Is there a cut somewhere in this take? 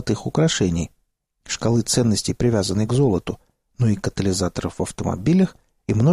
no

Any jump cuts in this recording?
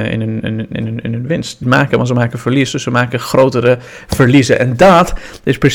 yes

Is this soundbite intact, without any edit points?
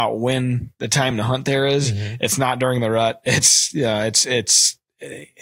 yes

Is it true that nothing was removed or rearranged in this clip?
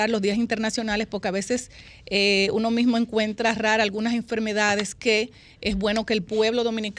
yes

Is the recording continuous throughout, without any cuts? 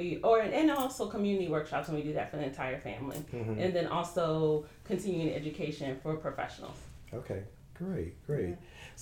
yes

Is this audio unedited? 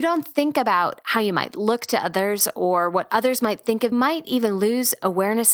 no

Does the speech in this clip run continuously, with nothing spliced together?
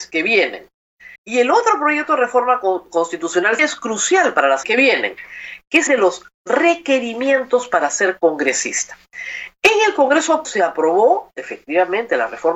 no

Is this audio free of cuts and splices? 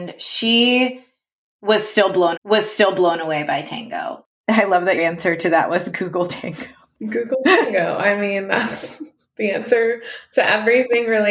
no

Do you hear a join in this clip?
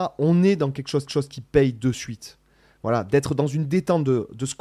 yes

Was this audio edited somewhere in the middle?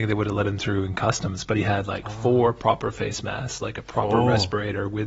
no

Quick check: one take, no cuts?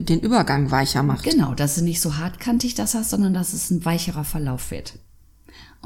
yes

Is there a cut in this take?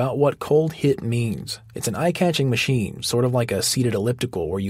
no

